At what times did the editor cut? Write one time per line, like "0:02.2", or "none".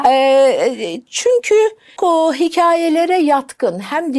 0:02.0